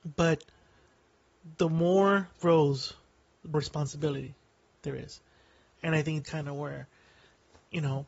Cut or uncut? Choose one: cut